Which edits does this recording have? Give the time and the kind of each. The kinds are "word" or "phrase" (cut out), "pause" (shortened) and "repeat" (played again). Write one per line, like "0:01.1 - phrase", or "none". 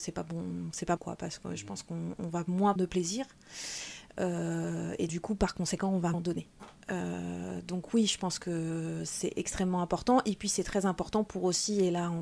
0:01.0 - word
0:02.8 - word
0:05.1 - word
0:06.1 - word

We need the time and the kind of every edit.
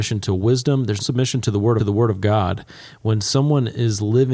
0:01.0 - word
0:01.8 - repeat

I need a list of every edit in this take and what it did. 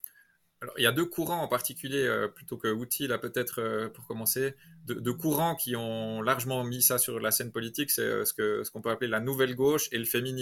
none

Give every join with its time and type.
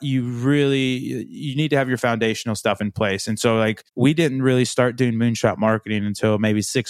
0:03.9 - pause

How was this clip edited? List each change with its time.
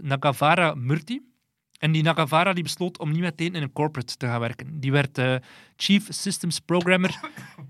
none

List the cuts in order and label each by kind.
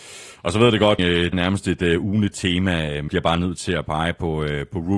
0:01.0 - word
0:01.3 - word
0:02.3 - word
0:03.1 - word

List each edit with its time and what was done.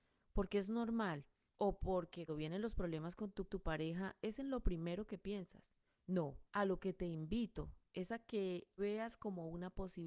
0:01.5 - pause
0:02.3 - word
0:03.5 - repeat
0:06.5 - pause
0:08.8 - word

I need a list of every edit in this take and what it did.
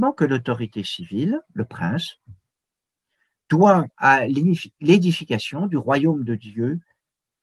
0:03.9 - word

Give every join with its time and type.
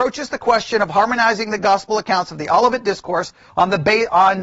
none

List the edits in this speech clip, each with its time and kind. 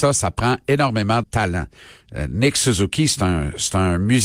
0:01.2 - word

